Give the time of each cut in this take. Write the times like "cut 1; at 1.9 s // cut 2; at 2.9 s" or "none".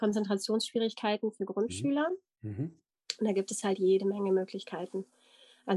none